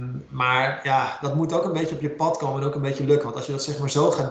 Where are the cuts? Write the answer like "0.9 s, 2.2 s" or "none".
none